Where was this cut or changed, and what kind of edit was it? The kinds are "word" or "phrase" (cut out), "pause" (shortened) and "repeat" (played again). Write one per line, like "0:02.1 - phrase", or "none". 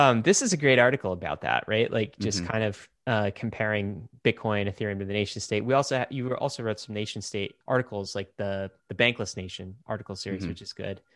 0:07.6 - pause
0:08.8 - pause